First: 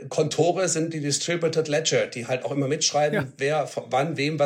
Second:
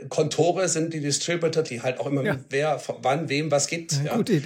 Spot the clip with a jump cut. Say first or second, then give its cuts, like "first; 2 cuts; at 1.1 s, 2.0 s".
second; 2 cuts; at 1.6 s, 2.2 s